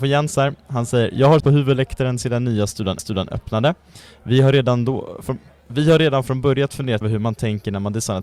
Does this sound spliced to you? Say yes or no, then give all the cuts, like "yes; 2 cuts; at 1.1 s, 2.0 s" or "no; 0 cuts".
yes; 3 cuts; at 1.4 s, 3.0 s, 7.0 s